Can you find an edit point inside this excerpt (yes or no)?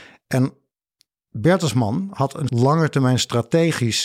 yes